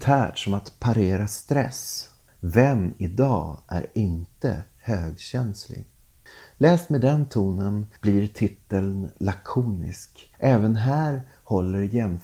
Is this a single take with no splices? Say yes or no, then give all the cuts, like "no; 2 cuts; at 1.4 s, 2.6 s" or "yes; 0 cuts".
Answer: no; 2 cuts; at 8.0 s, 10.3 s